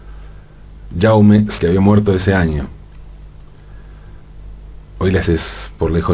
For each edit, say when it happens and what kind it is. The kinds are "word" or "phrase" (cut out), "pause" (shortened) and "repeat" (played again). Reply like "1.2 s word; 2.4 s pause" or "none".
1.6 s word; 4.9 s pause; 5.3 s phrase